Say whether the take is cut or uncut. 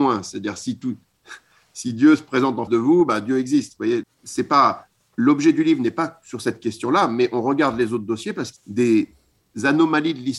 cut